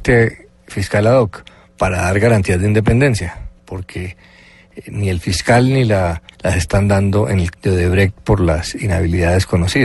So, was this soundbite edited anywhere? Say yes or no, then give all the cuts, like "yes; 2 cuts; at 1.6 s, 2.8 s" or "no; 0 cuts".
yes; 2 cuts; at 6.3 s, 7.5 s